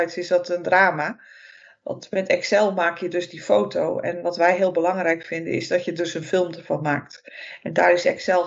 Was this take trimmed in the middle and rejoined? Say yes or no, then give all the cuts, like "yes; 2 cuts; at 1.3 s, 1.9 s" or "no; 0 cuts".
no; 0 cuts